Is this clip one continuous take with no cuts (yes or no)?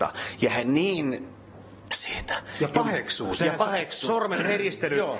no